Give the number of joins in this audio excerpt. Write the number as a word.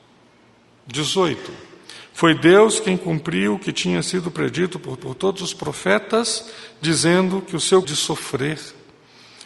two